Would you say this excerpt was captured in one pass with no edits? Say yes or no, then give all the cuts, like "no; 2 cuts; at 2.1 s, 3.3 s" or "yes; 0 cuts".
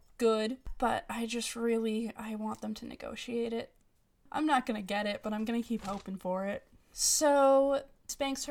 yes; 0 cuts